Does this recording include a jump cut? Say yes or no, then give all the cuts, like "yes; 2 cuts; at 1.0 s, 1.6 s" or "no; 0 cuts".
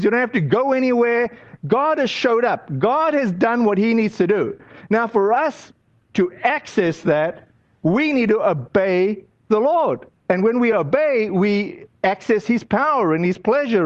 no; 0 cuts